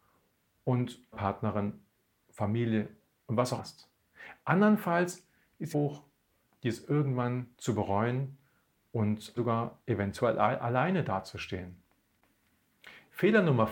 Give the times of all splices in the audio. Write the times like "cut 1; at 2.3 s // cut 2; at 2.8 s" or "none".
cut 1; at 1.1 s // cut 2; at 3.6 s // cut 3; at 5.7 s // cut 4; at 7.5 s // cut 5; at 9.4 s